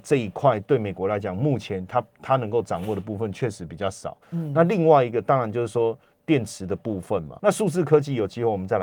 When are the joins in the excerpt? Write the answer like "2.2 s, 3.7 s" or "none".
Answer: 4.2 s, 7.4 s

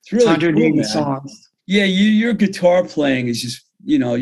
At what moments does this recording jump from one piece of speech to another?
1.6 s

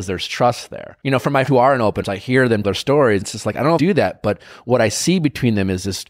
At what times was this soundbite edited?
1.0 s, 1.5 s, 2.0 s, 2.6 s, 3.2 s, 3.8 s

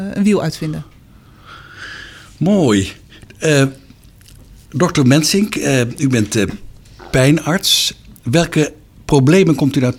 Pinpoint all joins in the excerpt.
none

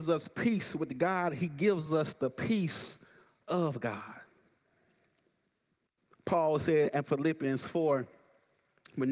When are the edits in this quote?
none

